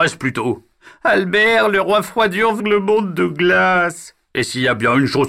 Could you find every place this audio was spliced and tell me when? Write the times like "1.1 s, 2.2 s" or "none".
2.6 s